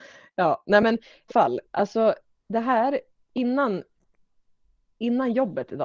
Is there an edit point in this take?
yes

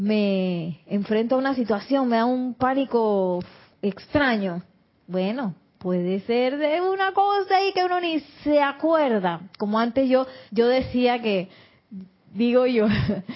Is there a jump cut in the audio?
yes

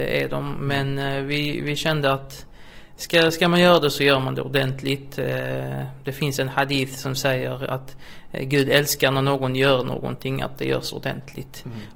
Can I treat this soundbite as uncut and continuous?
yes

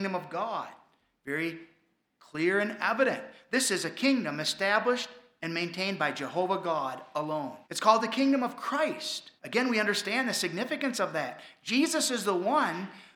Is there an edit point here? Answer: yes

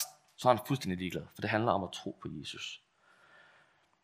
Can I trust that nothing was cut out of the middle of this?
yes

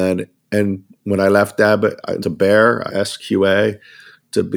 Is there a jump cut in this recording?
yes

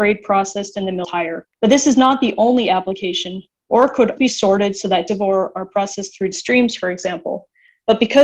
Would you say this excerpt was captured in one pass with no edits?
no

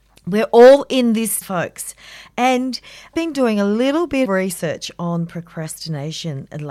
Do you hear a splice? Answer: yes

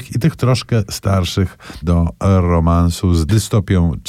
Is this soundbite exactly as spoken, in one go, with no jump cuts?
no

